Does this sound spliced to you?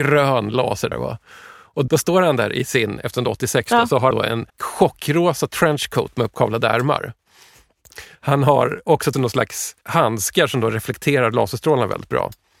yes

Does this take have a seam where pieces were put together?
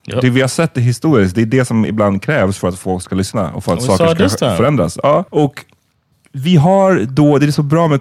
yes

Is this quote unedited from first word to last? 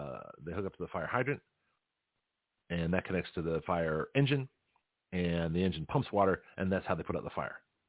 yes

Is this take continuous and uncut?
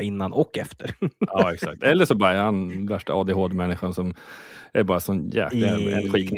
yes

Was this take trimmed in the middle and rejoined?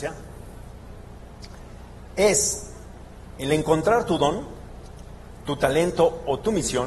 no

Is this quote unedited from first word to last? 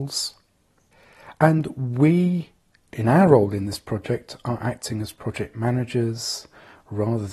yes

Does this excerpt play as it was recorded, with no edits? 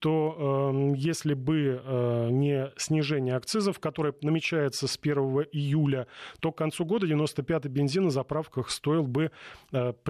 yes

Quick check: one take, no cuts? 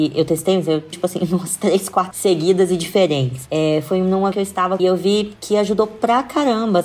no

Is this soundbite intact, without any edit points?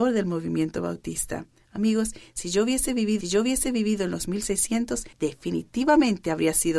no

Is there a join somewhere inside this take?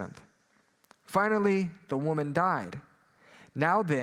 no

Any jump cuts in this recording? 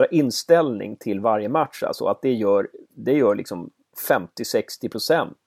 no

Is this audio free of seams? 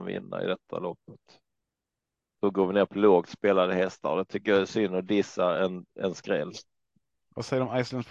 yes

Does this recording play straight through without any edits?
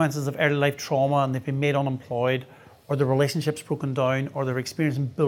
yes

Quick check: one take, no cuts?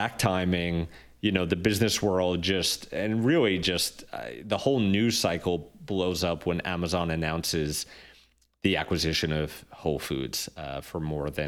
yes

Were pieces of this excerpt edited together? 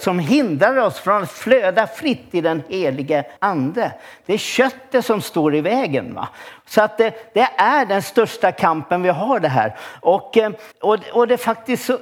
yes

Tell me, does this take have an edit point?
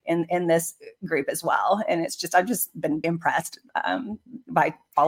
yes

